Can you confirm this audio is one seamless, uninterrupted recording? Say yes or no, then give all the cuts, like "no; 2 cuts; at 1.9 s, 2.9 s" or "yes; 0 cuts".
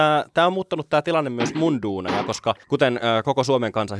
no; 1 cut; at 2.6 s